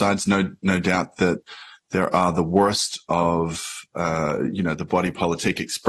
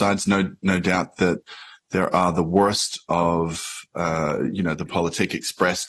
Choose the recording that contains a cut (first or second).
second